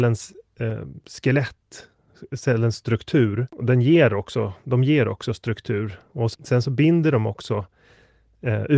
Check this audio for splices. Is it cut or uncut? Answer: cut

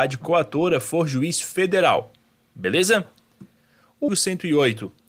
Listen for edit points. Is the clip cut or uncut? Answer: cut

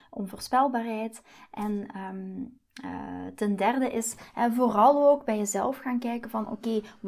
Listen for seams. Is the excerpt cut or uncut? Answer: uncut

